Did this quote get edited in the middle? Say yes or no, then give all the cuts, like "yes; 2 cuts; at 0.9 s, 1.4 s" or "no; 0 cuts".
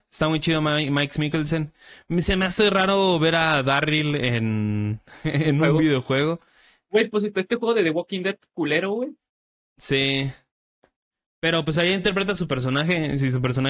no; 0 cuts